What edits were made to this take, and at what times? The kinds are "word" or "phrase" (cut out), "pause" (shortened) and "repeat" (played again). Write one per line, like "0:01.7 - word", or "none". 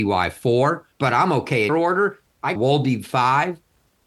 0:00.9 - pause
0:01.7 - word
0:02.6 - word

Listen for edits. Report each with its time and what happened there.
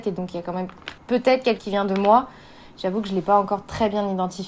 0:01.0 - pause
0:01.6 - word

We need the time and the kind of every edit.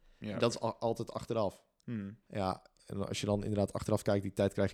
0:02.2 - pause

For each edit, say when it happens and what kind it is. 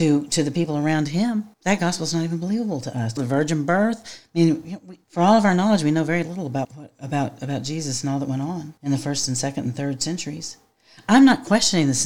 0:01.5 - pause
0:03.2 - phrase
0:05.0 - pause
0:06.6 - word
0:08.8 - pause

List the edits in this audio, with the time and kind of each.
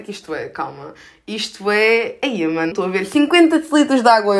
0:02.7 - word

